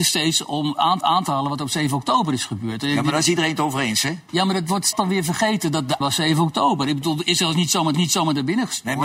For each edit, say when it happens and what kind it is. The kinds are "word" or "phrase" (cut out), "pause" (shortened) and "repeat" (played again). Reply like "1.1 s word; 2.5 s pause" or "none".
1.0 s repeat; 4.9 s phrase; 6.0 s word; 7.9 s repeat